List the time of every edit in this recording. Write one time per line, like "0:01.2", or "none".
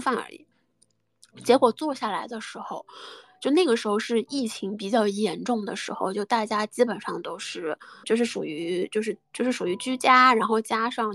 0:08.0